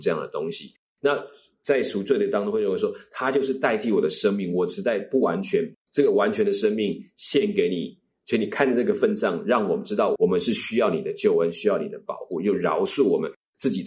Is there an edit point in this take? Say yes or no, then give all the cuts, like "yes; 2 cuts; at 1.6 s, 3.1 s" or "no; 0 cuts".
no; 0 cuts